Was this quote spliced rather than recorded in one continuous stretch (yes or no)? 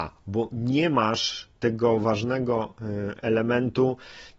no